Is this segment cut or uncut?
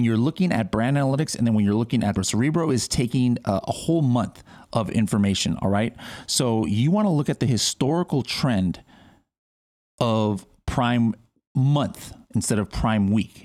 cut